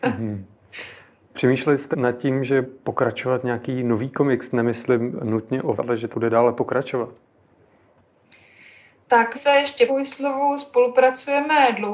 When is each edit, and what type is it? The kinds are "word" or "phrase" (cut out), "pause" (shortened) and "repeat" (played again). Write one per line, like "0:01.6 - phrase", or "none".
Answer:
0:01.9 - word
0:02.6 - word
0:05.8 - word
0:06.1 - word
0:09.3 - word
0:09.9 - word